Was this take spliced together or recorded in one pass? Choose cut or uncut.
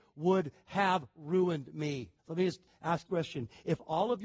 cut